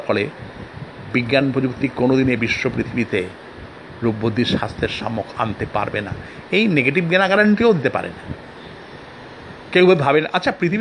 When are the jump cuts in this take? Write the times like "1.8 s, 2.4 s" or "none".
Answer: none

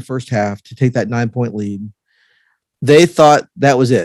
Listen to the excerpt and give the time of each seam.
none

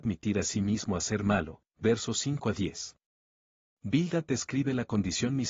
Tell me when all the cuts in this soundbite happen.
none

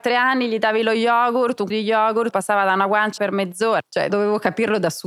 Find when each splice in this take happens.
1.7 s, 2.3 s, 3.2 s, 4.1 s

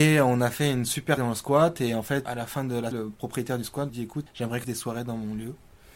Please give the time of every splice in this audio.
1.2 s, 2.3 s, 2.9 s, 3.9 s, 4.3 s, 4.6 s

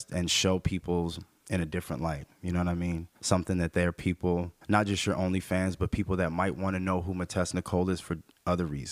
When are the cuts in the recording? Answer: 3.2 s, 4.6 s

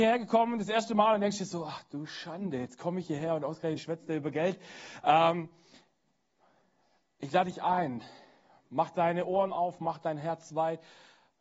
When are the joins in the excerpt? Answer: 3.8 s

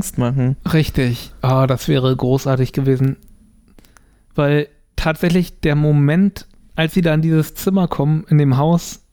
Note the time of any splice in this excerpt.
none

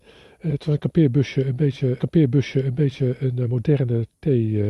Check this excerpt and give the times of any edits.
2.0 s

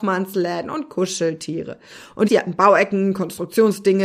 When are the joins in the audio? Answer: 2.3 s

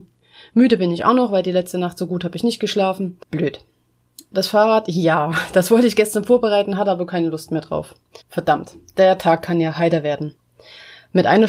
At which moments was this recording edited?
3.2 s, 8.2 s

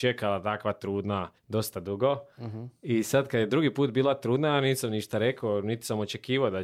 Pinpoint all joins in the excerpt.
1.4 s

